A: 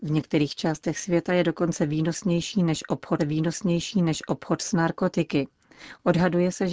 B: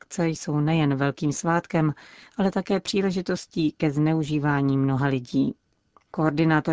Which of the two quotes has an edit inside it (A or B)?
A